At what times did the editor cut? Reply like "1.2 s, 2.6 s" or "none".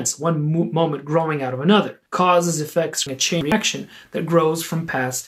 2.1 s, 3.1 s